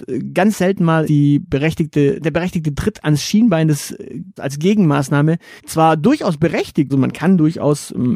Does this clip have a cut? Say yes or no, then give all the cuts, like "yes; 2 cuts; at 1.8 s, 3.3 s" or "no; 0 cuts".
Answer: yes; 5 cuts; at 1.0 s, 2.2 s, 4.4 s, 5.6 s, 6.9 s